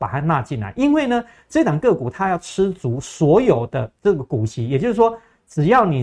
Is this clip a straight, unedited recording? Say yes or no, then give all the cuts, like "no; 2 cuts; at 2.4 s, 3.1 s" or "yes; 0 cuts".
yes; 0 cuts